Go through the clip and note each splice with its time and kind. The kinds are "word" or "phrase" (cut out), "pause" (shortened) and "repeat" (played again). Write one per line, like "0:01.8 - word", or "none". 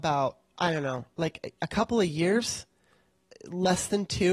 none